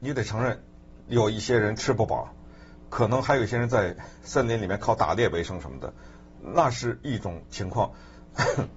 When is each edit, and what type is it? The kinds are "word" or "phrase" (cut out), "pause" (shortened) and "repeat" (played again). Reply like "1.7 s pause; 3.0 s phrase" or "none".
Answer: none